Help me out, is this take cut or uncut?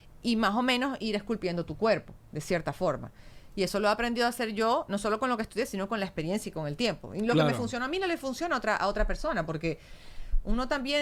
uncut